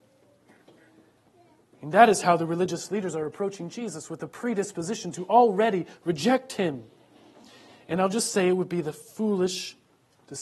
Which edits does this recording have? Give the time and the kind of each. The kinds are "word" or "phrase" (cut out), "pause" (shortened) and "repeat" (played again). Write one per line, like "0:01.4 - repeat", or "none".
none